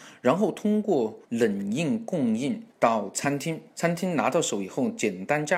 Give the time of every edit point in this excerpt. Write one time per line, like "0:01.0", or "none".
0:01.2
0:02.7
0:03.7

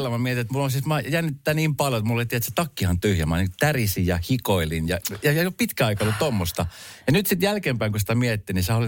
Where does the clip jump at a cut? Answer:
none

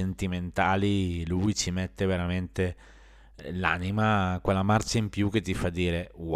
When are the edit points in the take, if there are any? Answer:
none

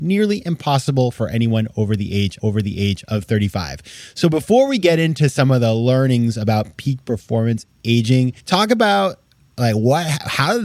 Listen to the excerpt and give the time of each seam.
0:02.4
0:08.4

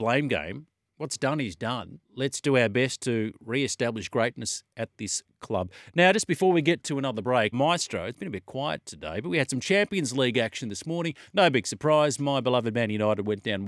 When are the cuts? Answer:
0:02.0
0:07.5

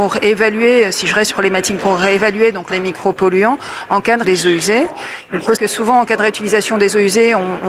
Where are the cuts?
0:01.3
0:01.8
0:02.7
0:04.2
0:05.6

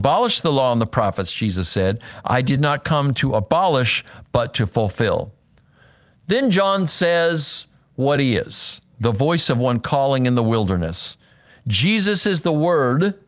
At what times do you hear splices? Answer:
none

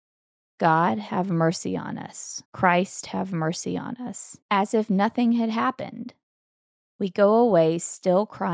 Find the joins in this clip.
0:02.5
0:04.4

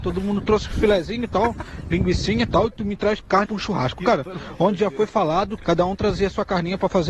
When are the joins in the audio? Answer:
0:03.5
0:05.6

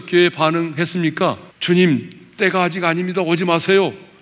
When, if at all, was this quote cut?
0:01.5

